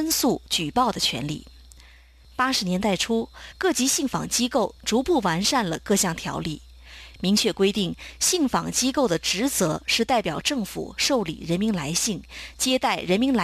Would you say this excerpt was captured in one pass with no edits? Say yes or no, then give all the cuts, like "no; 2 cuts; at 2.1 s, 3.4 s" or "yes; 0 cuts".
yes; 0 cuts